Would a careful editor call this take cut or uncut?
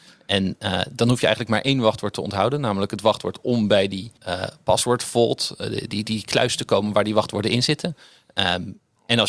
cut